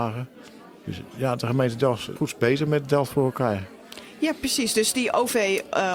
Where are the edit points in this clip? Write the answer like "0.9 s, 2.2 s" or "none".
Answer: 2.2 s